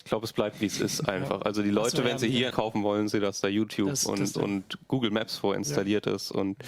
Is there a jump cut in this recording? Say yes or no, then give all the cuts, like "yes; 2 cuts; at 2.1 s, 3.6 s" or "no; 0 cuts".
yes; 2 cuts; at 2.5 s, 4.3 s